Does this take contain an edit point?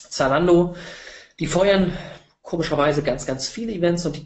no; 0 cuts

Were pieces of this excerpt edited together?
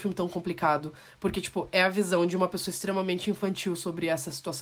no; 0 cuts

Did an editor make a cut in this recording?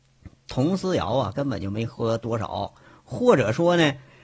no; 0 cuts

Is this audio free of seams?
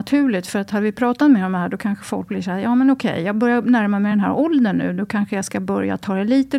yes; 0 cuts

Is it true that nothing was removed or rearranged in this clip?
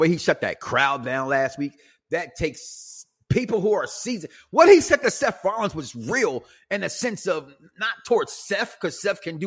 yes; 0 cuts

